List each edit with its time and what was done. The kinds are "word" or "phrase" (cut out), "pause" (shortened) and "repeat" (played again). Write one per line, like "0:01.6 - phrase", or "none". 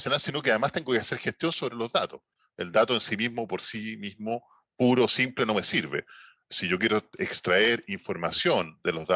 none